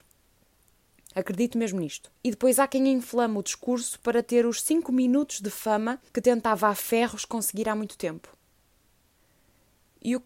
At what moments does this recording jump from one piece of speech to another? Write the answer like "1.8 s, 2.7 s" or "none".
2.2 s, 6.1 s